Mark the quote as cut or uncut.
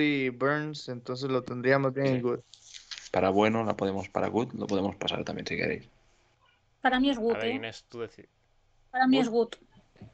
uncut